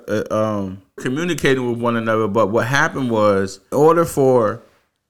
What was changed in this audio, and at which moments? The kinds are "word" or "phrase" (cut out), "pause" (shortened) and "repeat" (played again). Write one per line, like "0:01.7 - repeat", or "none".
0:01.0 - phrase
0:03.7 - word